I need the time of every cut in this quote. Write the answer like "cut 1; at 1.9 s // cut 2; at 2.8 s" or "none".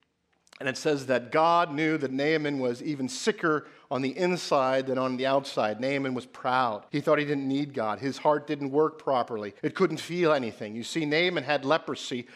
cut 1; at 6.9 s // cut 2; at 9.6 s